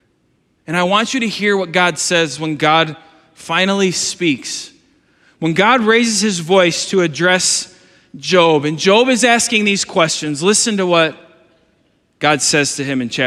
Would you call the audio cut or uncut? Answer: uncut